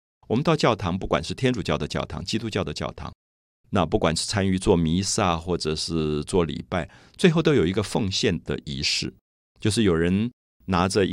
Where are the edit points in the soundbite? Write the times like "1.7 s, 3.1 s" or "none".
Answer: none